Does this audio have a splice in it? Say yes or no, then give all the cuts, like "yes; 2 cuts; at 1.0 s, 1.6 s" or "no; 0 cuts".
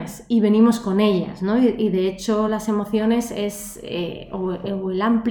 no; 0 cuts